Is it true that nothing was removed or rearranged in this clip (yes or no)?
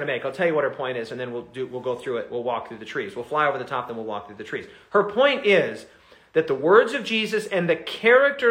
yes